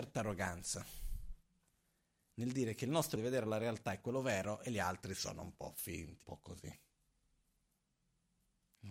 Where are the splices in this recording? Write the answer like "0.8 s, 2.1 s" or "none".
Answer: 3.2 s, 6.2 s